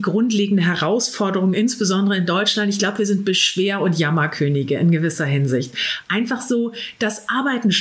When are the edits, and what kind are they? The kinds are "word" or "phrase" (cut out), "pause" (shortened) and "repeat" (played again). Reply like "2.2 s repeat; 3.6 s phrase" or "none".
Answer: none